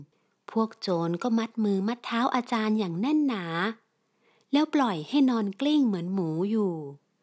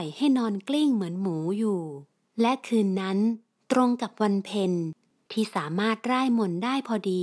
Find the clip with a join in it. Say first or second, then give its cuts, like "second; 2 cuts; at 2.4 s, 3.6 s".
second; 1 cut; at 2.2 s